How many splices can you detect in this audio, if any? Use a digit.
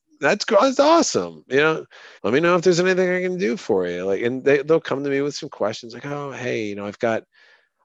1